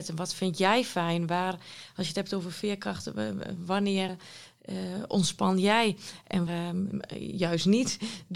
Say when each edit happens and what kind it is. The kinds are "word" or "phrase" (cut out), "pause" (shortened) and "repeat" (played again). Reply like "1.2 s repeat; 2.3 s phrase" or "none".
4.1 s word; 6.5 s word